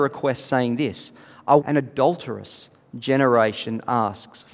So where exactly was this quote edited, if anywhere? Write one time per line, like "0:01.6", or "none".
0:01.6